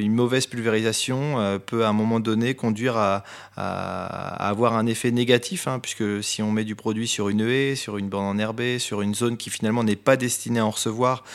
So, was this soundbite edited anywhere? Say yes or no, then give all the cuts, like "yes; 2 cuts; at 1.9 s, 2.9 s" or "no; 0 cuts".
no; 0 cuts